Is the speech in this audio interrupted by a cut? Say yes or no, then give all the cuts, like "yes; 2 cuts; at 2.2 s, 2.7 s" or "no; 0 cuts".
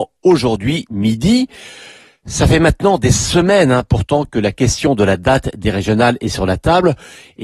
no; 0 cuts